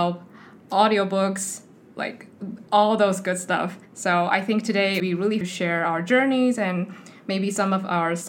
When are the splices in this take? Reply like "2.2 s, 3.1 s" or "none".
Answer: 2.7 s, 3.9 s, 5.0 s, 5.4 s